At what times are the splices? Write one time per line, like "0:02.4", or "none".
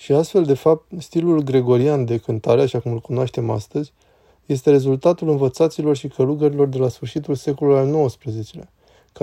none